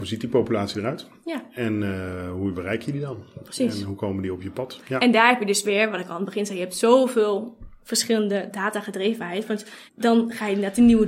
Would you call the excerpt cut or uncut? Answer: cut